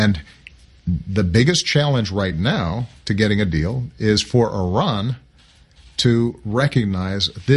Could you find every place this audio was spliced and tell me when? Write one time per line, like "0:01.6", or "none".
none